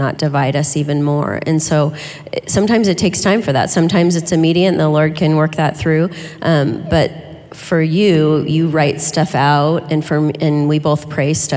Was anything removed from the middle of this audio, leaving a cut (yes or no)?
no